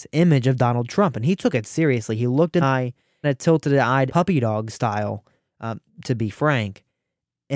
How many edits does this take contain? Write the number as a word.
four